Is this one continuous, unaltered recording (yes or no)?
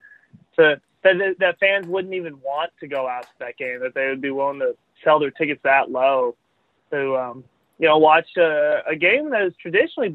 yes